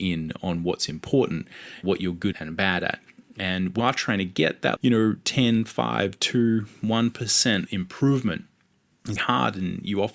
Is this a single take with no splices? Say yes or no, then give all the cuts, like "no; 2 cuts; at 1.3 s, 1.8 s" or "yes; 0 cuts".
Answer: no; 6 cuts; at 1.8 s, 2.3 s, 3.8 s, 4.8 s, 7.7 s, 9.2 s